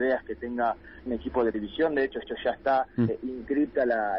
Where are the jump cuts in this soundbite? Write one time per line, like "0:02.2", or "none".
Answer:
0:01.1
0:01.5
0:02.2
0:03.1

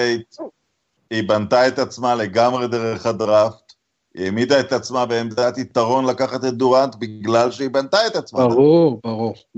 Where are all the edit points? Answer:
none

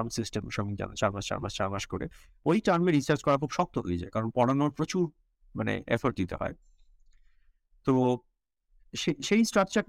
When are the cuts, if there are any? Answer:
none

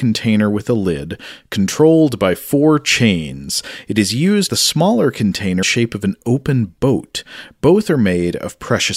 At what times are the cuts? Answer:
0:04.5
0:05.6

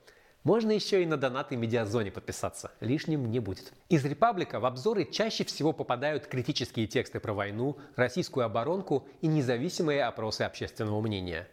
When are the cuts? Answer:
0:03.8

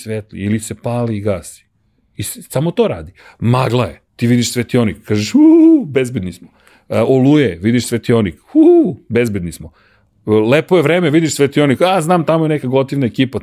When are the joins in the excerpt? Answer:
0:03.2
0:04.1

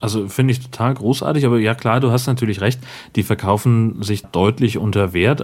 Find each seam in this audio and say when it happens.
0:04.2

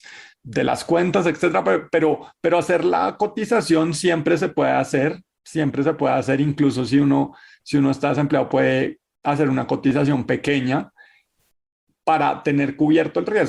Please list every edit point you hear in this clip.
none

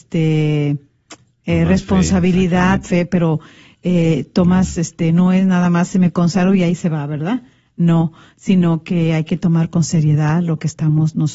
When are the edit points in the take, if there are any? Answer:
0:02.8

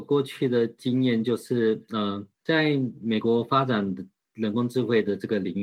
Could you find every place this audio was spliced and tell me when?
none

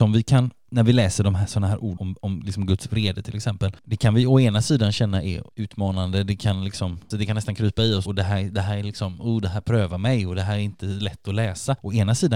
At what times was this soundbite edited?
0:02.0
0:05.5
0:08.0

